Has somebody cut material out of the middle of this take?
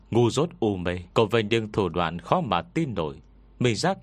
yes; 1 cut; at 1.1 s

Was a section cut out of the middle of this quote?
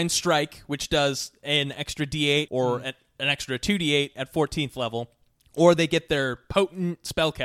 yes; 2 cuts; at 2.5 s, 5.4 s

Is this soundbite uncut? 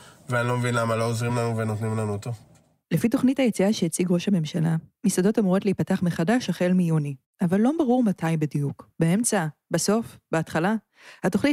yes; 0 cuts

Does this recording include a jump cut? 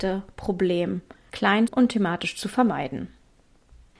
yes; 1 cut; at 1.7 s

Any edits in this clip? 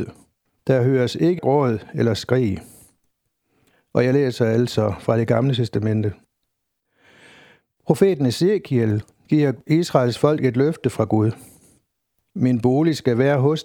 yes; 1 cut; at 1.4 s

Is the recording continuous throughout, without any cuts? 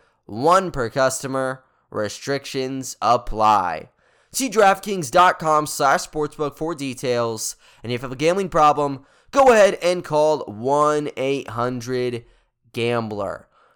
yes; 0 cuts

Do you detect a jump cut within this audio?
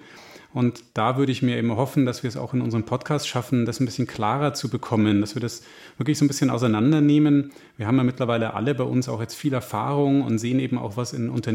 no; 0 cuts

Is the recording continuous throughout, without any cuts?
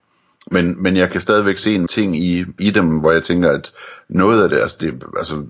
no; 2 cuts; at 1.9 s, 2.6 s

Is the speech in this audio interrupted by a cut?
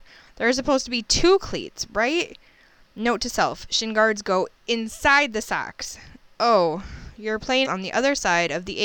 yes; 1 cut; at 7.6 s

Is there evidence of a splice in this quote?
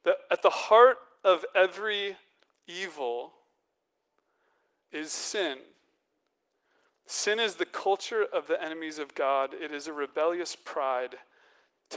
no; 0 cuts

